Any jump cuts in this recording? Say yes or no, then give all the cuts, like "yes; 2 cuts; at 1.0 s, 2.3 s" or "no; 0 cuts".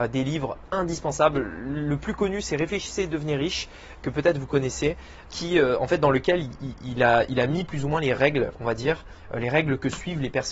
yes; 1 cut; at 5.2 s